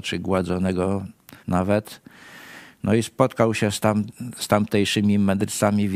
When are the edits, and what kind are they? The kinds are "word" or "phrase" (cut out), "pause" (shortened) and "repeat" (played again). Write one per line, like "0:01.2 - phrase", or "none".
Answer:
0:01.4 - pause